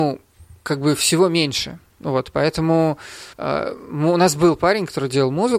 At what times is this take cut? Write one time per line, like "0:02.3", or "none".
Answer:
0:03.3